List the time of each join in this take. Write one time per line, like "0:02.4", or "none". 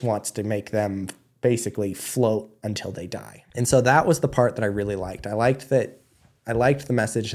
0:03.5